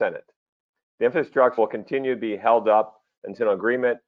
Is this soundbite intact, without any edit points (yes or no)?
no